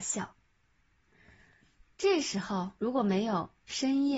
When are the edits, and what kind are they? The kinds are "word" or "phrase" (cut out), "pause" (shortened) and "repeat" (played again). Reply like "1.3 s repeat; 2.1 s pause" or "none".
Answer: 2.8 s pause

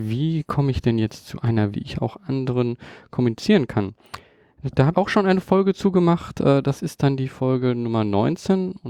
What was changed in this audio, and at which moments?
1.7 s word; 4.9 s word

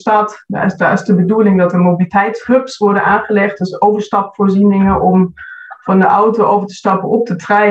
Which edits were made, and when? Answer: none

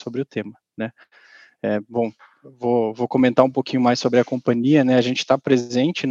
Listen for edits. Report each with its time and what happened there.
none

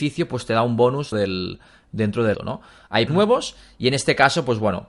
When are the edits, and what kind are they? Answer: 1.1 s word; 2.3 s word; 3.1 s word

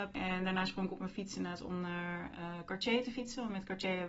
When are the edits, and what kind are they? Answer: none

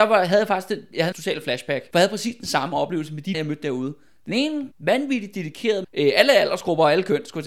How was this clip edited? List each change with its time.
1.1 s word; 1.9 s word; 3.3 s word; 4.7 s word; 5.8 s word

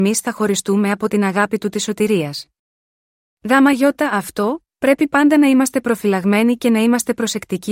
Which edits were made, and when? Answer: none

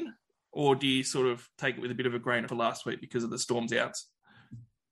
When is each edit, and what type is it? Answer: 2.5 s phrase

